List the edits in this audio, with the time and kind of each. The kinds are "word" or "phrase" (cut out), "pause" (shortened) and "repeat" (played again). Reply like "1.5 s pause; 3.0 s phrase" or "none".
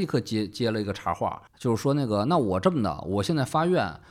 1.5 s pause